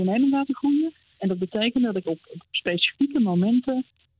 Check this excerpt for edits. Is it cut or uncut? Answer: uncut